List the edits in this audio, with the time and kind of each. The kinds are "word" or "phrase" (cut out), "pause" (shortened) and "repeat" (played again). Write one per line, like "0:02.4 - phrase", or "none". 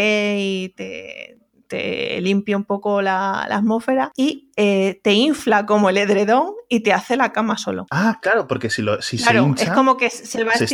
none